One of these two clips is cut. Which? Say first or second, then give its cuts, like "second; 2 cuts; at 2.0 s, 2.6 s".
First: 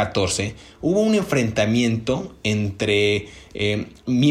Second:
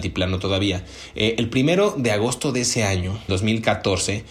second; 1 cut; at 3.3 s